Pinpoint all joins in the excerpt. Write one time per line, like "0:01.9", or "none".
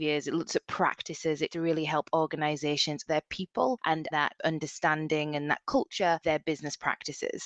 0:01.5
0:03.1
0:04.1
0:06.2